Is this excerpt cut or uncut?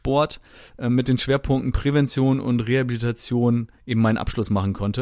cut